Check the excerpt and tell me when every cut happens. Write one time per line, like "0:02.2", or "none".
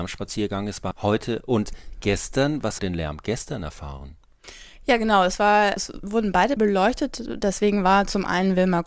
0:00.9
0:02.8
0:05.8
0:06.6